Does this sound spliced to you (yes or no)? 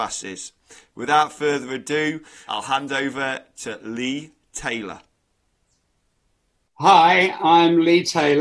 yes